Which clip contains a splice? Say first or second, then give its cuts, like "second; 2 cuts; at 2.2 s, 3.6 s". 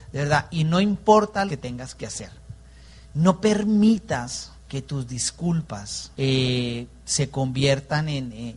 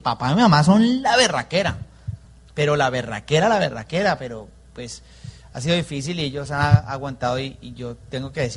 first; 4 cuts; at 1.5 s, 3.0 s, 4.6 s, 6.1 s